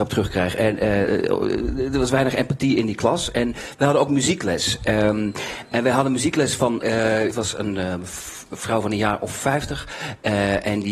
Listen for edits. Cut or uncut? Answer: uncut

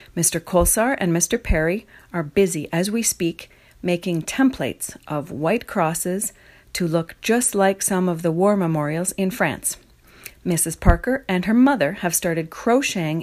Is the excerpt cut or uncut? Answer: uncut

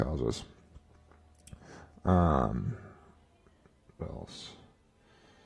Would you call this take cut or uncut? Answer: cut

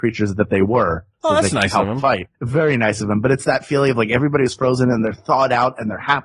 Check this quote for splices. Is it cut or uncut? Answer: cut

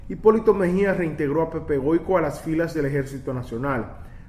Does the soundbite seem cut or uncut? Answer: uncut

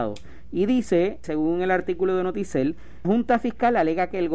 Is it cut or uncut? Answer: cut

